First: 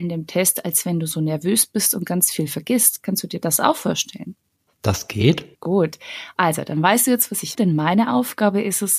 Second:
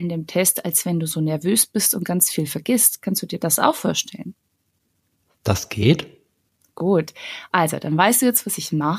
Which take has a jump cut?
first; 3 cuts; at 4.7 s, 5.5 s, 7.5 s

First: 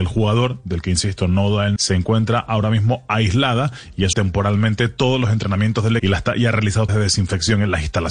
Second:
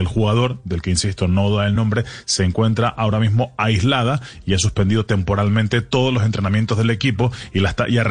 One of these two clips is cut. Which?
first; 4 cuts; at 1.8 s, 4.1 s, 6.0 s, 6.9 s

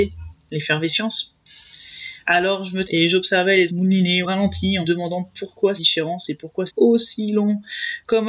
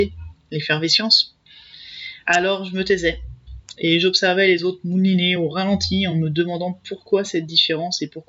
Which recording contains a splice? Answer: first; 6 cuts; at 2.8 s, 3.7 s, 4.2 s, 4.8 s, 5.8 s, 6.7 s

